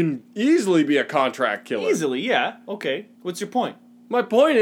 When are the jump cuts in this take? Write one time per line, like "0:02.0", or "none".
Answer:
0:03.1